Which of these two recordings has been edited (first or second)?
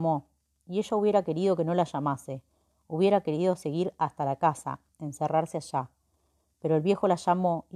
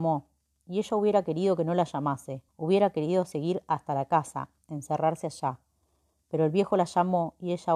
second